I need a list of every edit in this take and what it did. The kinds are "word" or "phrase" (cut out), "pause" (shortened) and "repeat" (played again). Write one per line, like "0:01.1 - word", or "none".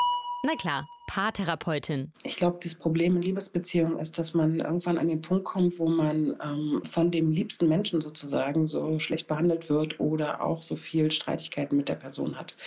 0:06.8 - word